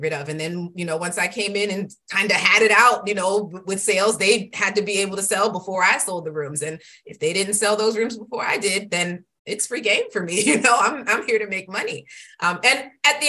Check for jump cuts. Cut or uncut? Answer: uncut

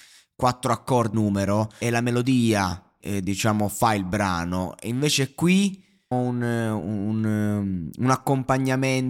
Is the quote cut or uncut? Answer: cut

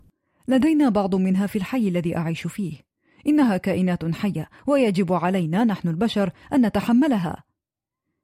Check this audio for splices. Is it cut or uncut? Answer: uncut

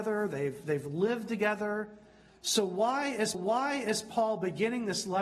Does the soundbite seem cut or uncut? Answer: cut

